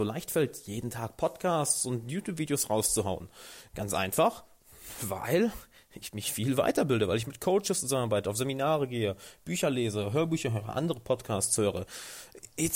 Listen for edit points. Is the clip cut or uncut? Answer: uncut